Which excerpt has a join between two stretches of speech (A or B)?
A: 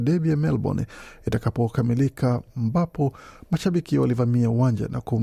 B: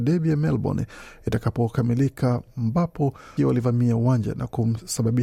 B